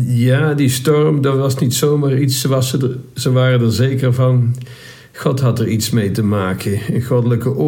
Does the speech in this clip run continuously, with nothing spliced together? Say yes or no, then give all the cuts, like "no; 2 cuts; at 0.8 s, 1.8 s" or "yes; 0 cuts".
yes; 0 cuts